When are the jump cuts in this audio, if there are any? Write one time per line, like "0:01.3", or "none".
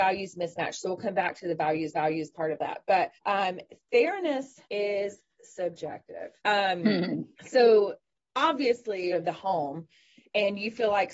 0:01.9
0:03.2
0:04.6
0:06.4
0:07.3
0:09.1